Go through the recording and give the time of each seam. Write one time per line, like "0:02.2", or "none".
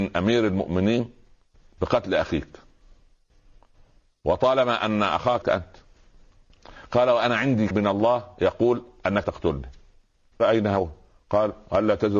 0:05.4
0:07.7
0:09.2
0:10.4